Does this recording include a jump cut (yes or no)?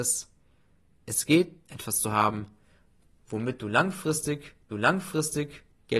yes